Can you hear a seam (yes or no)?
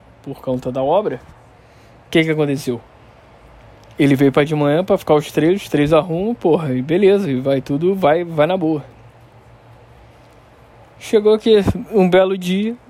no